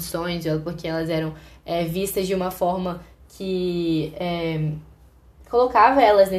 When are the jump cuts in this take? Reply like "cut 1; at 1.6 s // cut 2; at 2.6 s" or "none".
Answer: none